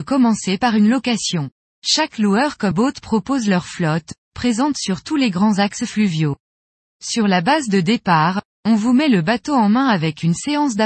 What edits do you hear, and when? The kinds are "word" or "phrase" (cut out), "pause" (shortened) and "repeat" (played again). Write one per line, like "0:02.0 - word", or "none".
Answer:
0:02.7 - word